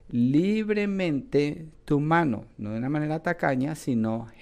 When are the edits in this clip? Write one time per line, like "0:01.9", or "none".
none